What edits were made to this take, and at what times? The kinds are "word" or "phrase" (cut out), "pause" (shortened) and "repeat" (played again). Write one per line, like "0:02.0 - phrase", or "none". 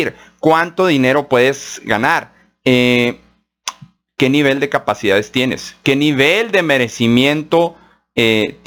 none